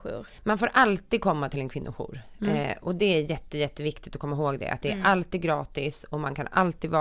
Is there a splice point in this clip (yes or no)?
no